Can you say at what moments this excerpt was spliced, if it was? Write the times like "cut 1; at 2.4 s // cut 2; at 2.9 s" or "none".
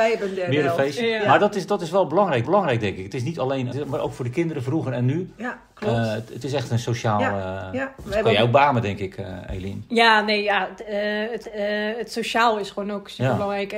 cut 1; at 2.4 s // cut 2; at 3.7 s // cut 3; at 11.4 s